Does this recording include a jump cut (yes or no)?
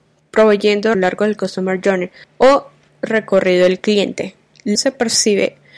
yes